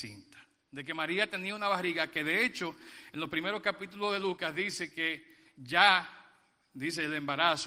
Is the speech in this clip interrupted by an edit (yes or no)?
no